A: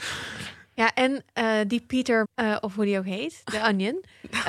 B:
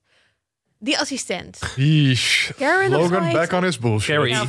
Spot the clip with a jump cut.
A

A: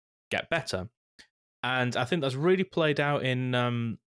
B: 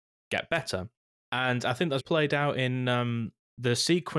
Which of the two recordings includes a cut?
B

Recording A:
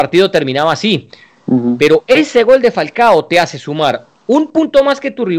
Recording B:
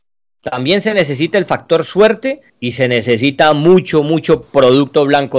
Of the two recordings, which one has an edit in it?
B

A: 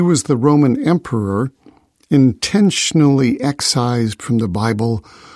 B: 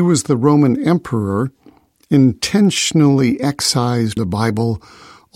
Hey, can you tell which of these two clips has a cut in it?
B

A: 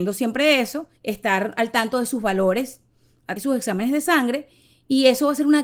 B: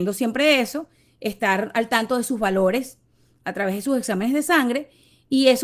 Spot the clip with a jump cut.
A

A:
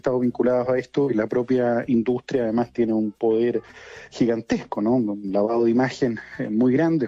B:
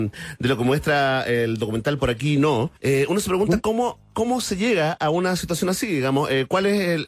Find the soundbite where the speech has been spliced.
B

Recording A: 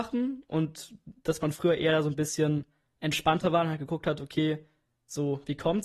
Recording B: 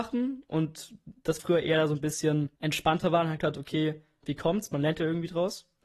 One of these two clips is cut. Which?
B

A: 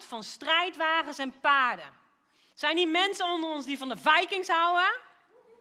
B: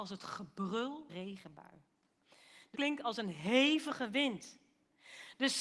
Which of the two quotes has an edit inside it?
B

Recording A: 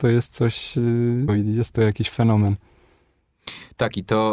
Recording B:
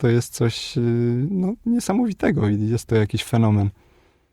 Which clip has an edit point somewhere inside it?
A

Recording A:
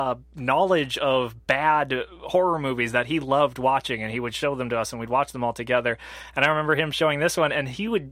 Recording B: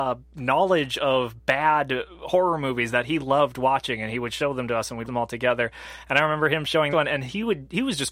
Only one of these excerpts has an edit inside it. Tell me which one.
B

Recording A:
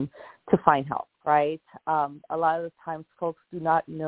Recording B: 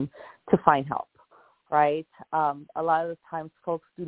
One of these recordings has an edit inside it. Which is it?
A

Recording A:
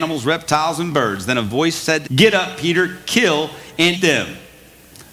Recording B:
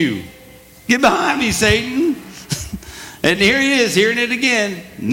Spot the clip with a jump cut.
A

